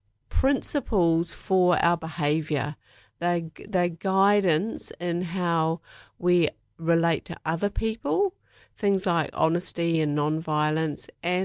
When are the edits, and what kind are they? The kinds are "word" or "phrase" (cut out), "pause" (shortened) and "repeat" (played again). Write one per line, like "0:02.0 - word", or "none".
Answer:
none

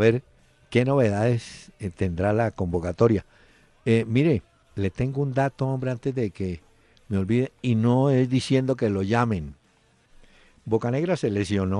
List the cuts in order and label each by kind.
none

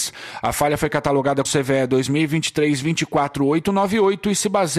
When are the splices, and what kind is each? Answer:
0:01.4 - word

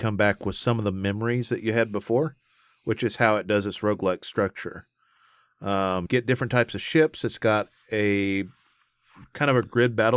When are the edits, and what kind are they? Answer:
0:06.1 - word

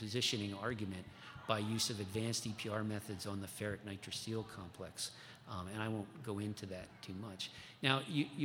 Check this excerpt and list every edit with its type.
none

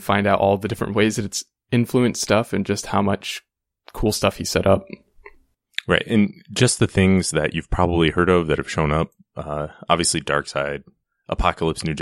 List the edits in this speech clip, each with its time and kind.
none

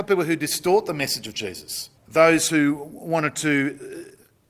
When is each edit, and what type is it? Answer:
0:02.0 - pause

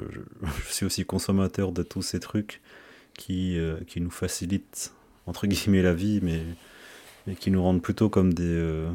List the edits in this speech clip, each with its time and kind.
none

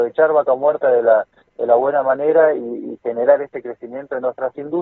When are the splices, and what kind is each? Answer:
none

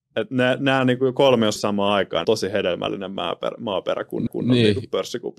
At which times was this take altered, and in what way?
0:01.6 - word
0:02.2 - phrase
0:04.3 - repeat

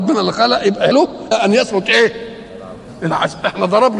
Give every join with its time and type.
0:00.9 - word
0:01.3 - word

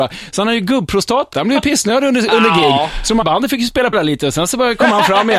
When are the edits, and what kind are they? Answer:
0:01.3 - word
0:03.2 - word
0:03.9 - word

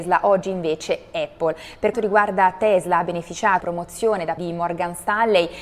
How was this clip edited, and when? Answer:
0:01.9 - word
0:03.6 - word
0:04.4 - word

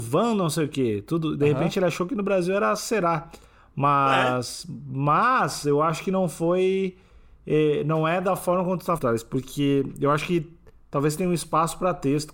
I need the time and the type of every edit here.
0:09.0 - word

